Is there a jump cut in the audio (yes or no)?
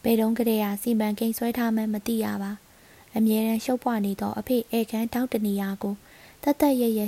no